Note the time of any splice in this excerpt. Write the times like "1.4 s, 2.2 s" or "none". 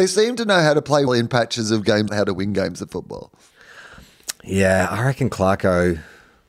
1.1 s, 2.1 s